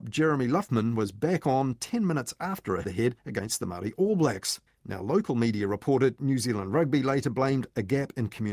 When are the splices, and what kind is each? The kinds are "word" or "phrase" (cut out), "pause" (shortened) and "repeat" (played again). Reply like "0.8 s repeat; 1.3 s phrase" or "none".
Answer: 2.8 s phrase; 3.2 s pause; 4.7 s pause